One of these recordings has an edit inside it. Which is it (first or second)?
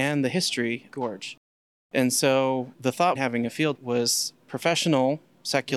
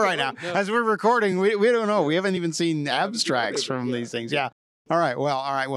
first